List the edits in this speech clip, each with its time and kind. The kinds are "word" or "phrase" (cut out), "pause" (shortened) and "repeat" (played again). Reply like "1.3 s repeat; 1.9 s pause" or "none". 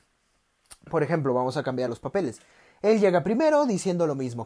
1.9 s word